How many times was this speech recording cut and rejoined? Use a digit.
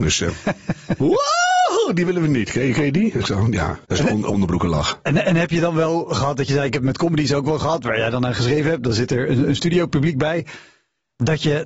1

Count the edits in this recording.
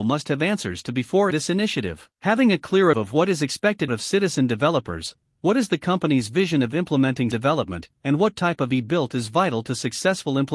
6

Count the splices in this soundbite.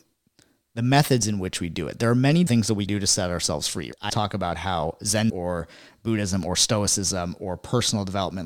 4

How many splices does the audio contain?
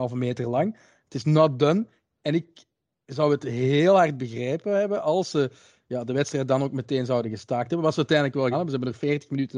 1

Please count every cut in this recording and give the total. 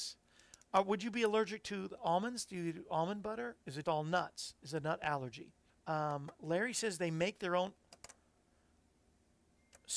2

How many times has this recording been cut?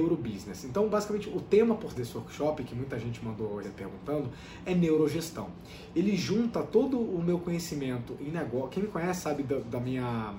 2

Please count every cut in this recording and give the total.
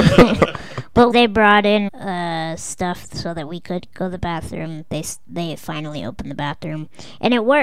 2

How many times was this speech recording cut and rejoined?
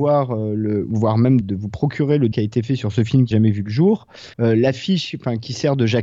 4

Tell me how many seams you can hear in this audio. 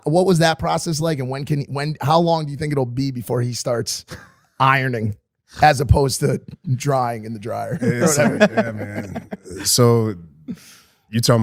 0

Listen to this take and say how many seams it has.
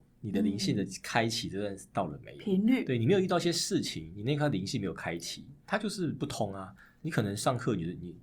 0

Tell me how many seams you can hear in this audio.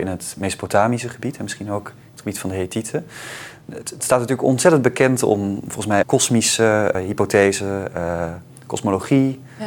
2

